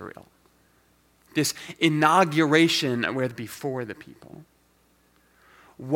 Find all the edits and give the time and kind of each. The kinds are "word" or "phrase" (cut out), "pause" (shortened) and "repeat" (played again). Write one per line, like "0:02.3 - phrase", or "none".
0:03.3 - phrase